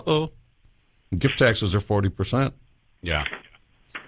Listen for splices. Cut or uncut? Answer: uncut